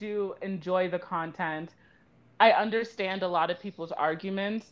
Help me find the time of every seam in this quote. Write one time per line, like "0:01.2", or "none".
none